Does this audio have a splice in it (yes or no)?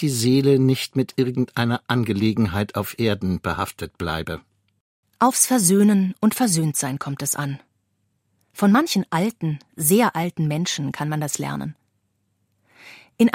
no